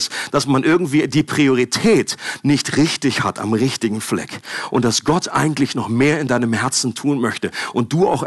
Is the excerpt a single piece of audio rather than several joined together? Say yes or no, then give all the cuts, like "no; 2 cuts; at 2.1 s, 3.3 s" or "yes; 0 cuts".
yes; 0 cuts